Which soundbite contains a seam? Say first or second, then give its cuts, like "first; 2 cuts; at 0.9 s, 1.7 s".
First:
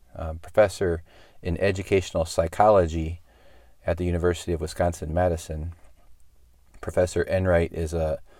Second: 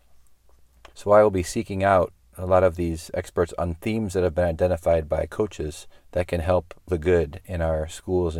second; 3 cuts; at 0.9 s, 6.0 s, 6.9 s